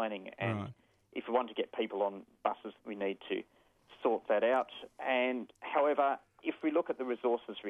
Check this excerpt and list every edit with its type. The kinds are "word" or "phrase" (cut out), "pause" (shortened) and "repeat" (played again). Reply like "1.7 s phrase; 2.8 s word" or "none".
2.8 s word